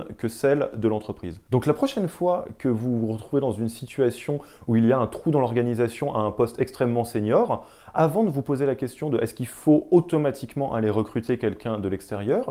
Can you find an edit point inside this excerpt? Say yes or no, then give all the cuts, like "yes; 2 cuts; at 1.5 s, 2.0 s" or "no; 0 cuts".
no; 0 cuts